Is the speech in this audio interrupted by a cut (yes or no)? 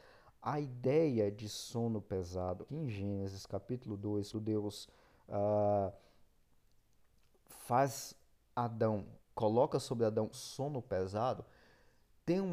yes